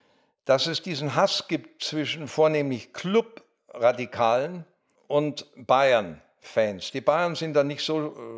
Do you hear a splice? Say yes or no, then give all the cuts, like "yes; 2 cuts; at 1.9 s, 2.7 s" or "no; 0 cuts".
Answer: yes; 1 cut; at 5.0 s